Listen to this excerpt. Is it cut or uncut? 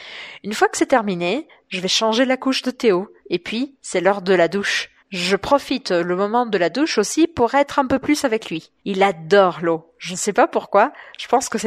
cut